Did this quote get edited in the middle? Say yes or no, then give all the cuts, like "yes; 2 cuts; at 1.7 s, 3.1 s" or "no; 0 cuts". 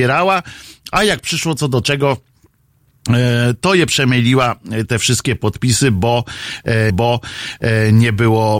yes; 1 cut; at 6.9 s